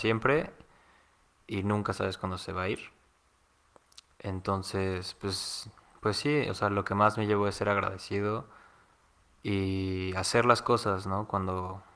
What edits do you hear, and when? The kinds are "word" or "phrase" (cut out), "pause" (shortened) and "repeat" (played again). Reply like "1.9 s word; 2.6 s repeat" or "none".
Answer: none